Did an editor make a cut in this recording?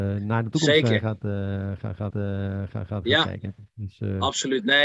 yes; 1 cut; at 2.1 s

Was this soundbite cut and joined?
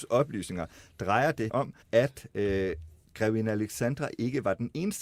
yes; 2 cuts; at 1.5 s, 1.8 s

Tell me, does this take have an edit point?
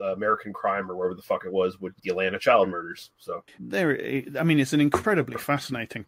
yes; 2 cuts; at 2.0 s, 3.6 s

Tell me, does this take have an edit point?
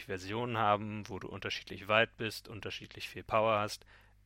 no; 0 cuts

